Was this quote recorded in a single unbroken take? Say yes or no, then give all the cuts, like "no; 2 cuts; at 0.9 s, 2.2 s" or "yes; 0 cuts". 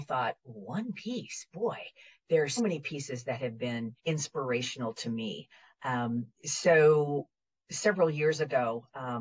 no; 2 cuts; at 2.6 s, 4.0 s